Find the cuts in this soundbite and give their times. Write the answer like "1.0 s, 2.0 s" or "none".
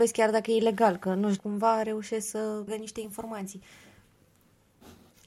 1.4 s, 2.7 s